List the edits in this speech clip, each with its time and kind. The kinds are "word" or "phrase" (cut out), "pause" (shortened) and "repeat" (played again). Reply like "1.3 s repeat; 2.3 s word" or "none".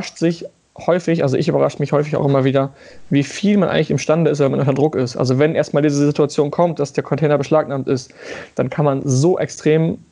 none